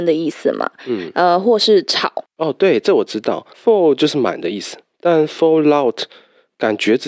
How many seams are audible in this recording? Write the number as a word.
two